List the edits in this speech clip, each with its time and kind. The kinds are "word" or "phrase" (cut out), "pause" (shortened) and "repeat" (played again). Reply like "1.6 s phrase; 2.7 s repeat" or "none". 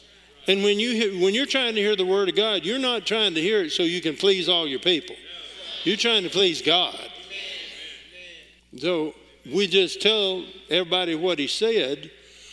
8.6 s pause